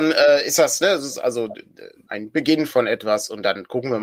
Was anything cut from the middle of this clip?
yes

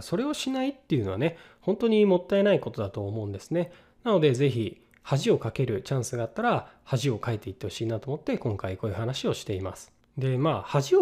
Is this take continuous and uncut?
yes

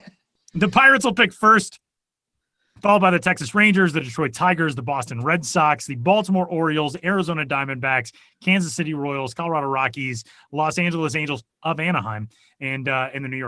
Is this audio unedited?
yes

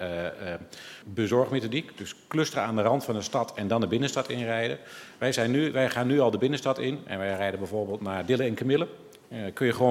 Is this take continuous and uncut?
no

